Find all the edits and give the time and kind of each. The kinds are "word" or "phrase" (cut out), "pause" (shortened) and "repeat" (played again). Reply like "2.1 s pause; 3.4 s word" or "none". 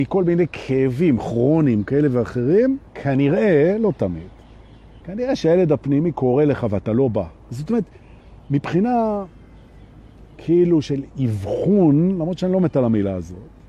2.9 s pause; 5.0 s pause; 7.4 s pause; 11.1 s pause